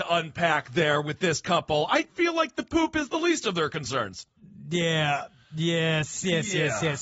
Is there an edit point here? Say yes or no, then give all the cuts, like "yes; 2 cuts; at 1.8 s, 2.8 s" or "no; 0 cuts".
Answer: no; 0 cuts